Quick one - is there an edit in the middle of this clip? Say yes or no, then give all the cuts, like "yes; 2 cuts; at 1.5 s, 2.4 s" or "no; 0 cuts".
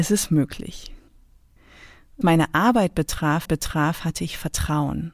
yes; 2 cuts; at 2.2 s, 3.5 s